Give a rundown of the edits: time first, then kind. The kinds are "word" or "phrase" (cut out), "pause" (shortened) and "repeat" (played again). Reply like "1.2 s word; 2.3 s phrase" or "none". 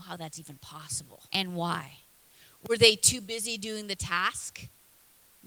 1.3 s pause; 2.2 s pause